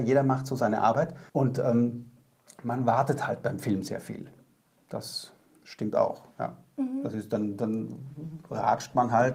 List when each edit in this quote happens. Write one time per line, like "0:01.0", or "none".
0:01.3